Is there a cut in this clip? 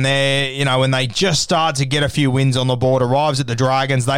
no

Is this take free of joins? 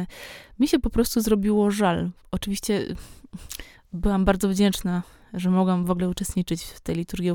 yes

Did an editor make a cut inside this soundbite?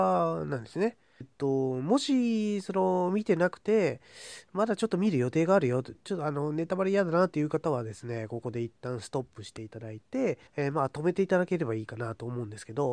yes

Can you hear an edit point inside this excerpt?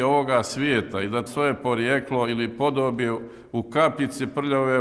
yes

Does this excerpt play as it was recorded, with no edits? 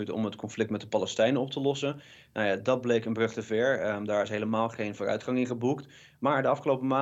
yes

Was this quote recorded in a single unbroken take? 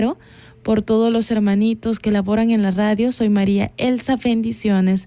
yes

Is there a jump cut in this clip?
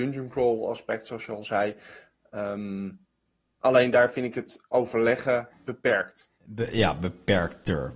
no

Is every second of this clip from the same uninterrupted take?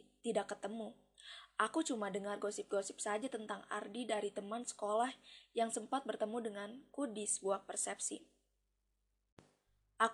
yes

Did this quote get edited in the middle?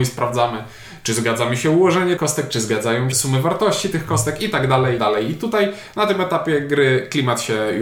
yes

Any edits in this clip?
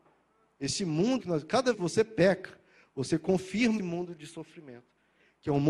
yes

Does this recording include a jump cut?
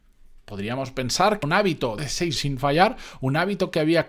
yes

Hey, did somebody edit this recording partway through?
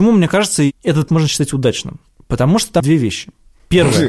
yes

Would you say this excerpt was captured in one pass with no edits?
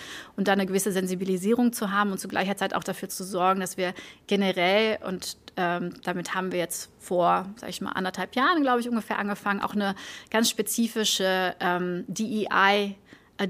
yes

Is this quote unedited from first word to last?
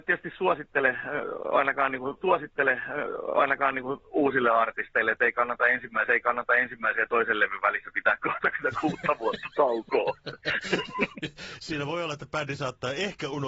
no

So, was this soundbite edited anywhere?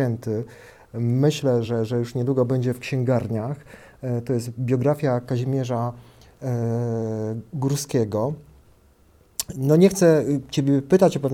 no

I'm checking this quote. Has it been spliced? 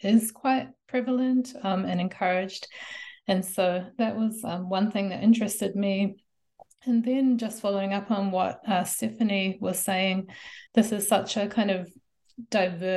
yes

